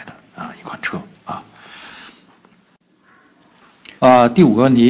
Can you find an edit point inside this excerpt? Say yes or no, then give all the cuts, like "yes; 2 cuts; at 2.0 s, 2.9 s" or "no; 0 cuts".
yes; 1 cut; at 4.0 s